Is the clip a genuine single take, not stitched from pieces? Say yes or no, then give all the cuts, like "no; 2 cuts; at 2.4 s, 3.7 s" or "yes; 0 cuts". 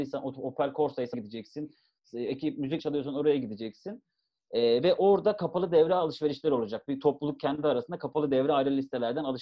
no; 2 cuts; at 1.1 s, 2.8 s